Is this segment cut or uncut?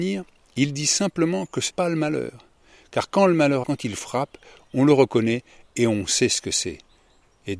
cut